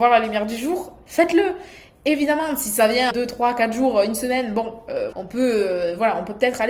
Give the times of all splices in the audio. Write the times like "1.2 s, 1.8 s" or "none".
3.1 s, 5.1 s